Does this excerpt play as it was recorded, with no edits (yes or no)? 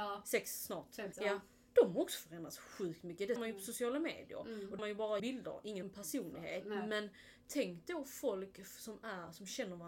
no